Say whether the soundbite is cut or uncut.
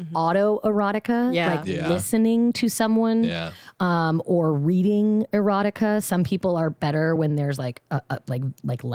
uncut